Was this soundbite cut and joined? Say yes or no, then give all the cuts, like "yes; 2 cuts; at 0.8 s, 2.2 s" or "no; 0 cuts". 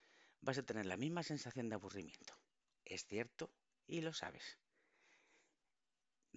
no; 0 cuts